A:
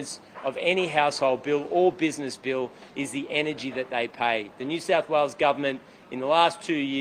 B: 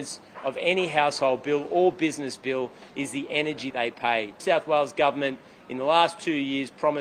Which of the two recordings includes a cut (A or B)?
B